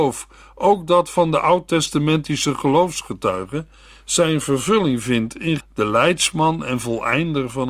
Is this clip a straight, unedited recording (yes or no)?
no